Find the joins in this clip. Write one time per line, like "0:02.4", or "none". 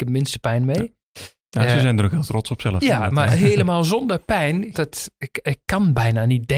0:03.3
0:04.7